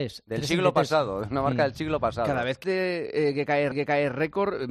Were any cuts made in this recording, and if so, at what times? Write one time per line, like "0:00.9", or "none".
0:02.6
0:03.7